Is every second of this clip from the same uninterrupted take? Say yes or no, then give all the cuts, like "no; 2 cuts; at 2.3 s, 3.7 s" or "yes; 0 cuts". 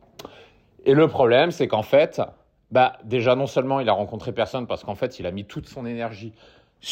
yes; 0 cuts